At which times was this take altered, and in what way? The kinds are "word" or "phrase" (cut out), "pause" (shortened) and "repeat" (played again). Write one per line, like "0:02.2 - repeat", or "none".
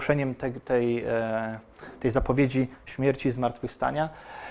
0:02.7 - pause